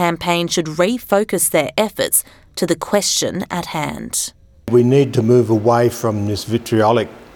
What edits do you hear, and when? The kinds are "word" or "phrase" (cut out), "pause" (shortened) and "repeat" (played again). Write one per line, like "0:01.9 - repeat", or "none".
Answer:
none